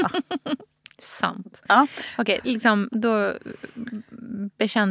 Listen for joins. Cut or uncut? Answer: cut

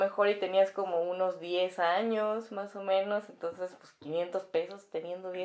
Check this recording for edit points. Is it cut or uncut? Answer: uncut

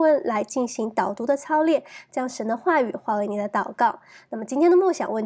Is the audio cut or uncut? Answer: uncut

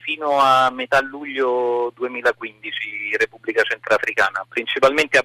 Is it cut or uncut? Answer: uncut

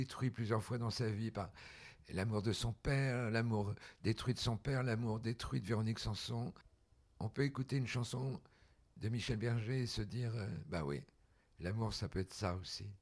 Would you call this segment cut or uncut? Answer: uncut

